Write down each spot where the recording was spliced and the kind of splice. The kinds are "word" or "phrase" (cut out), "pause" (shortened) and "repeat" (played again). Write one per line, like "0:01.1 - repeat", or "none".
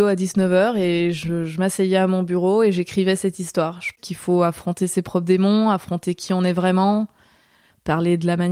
0:03.9 - word

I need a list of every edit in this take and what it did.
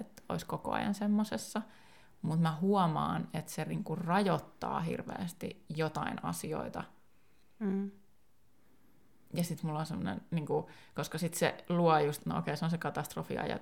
none

